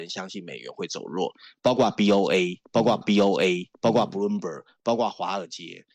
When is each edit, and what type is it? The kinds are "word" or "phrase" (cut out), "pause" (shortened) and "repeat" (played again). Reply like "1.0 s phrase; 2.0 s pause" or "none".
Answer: 3.0 s repeat